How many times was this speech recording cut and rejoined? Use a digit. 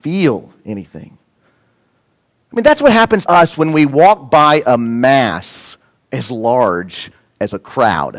1